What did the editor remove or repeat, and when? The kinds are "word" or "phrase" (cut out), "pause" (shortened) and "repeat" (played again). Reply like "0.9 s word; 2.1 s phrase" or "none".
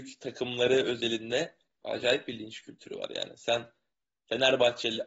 1.8 s word